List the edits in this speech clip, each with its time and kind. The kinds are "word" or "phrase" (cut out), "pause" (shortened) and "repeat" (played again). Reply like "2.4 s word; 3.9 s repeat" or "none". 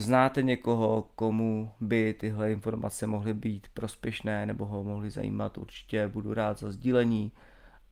none